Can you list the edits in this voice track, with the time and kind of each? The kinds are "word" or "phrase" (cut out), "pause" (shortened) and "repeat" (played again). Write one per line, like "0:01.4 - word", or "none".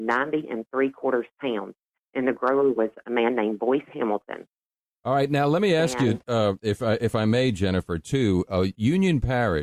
none